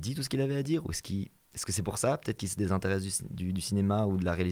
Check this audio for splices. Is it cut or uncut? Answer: uncut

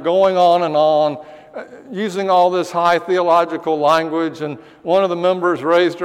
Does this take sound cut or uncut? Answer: uncut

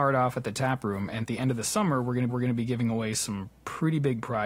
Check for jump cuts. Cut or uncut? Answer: cut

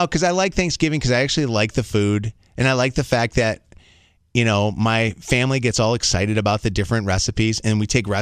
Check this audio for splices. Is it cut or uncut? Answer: uncut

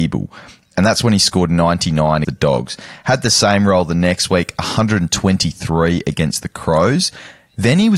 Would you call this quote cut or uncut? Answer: cut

